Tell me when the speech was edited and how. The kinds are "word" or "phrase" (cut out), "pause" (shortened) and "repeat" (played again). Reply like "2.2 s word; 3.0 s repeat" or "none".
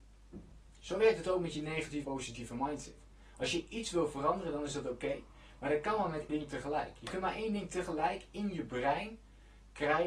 2.0 s word; 6.3 s word